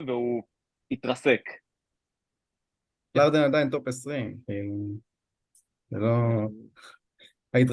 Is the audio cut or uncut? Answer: cut